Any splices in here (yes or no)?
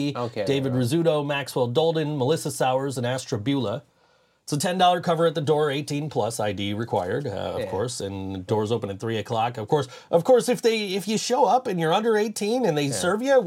no